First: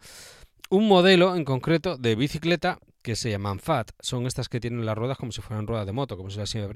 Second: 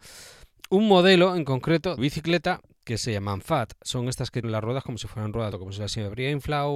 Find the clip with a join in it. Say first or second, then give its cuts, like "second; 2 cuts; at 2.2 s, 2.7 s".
second; 3 cuts; at 2.0 s, 4.4 s, 5.5 s